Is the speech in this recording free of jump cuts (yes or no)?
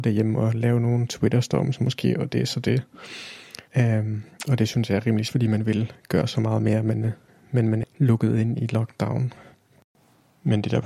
no